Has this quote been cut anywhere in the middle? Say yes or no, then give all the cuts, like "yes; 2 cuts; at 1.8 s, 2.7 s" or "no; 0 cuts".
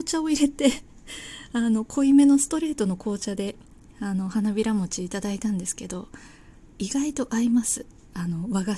no; 0 cuts